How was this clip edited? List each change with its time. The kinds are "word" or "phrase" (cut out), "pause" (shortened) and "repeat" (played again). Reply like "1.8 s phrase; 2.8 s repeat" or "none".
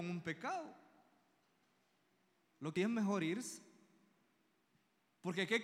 2.8 s word

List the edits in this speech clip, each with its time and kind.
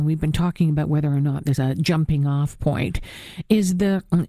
1.6 s word

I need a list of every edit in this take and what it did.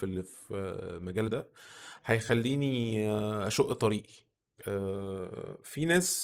1.3 s word

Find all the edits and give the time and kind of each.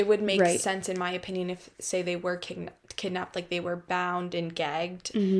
none

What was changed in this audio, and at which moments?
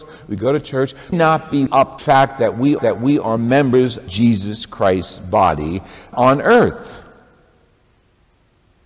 1.1 s phrase; 1.7 s word; 2.0 s phrase; 2.8 s repeat; 4.1 s word; 6.1 s phrase

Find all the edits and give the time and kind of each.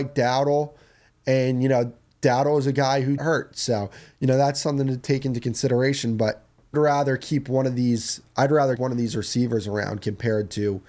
3.2 s phrase; 6.7 s phrase; 8.8 s word

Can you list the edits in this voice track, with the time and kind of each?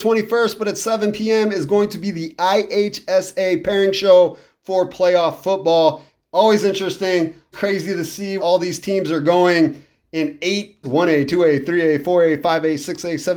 7.5 s word; 8.4 s word; 10.8 s word

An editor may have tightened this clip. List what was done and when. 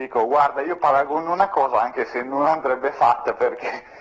none

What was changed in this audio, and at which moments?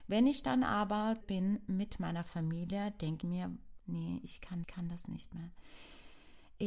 1.2 s phrase; 3.2 s word; 3.8 s word; 4.6 s repeat

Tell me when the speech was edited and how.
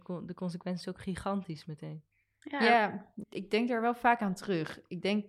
3.2 s word

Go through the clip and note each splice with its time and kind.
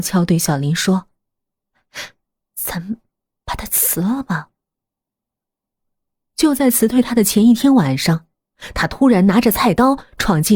none

